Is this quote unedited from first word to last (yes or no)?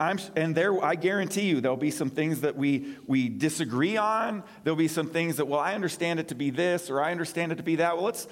yes